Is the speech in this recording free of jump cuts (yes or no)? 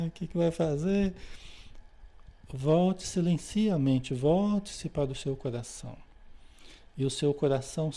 yes